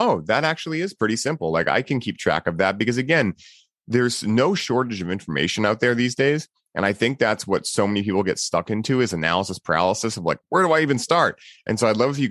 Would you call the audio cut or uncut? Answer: uncut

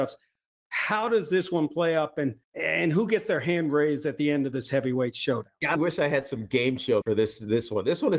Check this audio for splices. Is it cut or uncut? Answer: cut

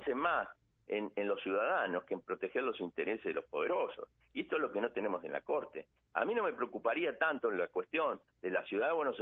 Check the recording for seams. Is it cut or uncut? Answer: uncut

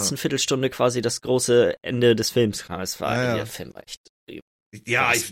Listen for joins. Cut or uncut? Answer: uncut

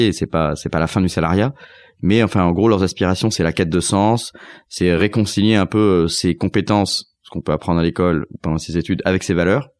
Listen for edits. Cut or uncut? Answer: uncut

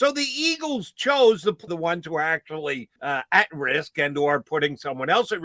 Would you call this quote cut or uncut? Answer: cut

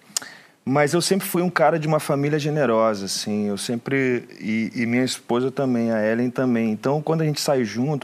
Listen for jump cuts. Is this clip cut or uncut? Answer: uncut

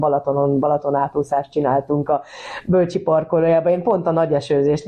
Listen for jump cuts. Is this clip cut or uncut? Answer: uncut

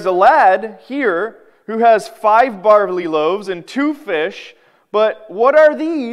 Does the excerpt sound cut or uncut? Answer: uncut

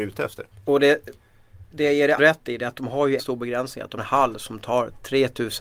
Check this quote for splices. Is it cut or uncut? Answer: cut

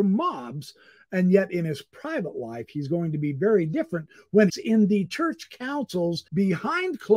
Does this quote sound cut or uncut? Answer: cut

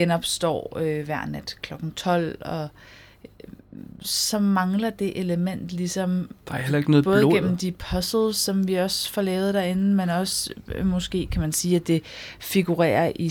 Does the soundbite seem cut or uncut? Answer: uncut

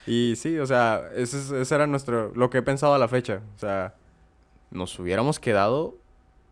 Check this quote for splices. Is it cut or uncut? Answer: uncut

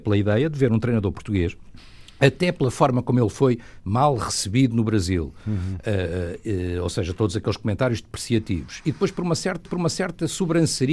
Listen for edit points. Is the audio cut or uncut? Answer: cut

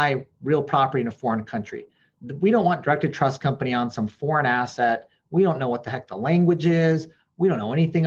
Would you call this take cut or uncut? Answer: uncut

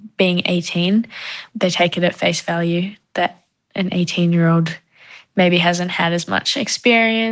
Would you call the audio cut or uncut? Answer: uncut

